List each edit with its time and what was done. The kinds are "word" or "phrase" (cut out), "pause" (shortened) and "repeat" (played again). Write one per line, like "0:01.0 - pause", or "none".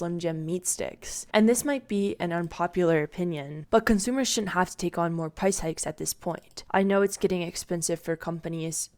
none